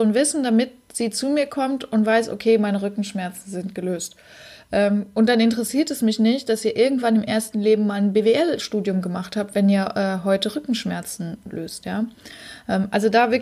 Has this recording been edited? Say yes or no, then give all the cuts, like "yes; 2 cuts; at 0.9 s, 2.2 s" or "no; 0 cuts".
no; 0 cuts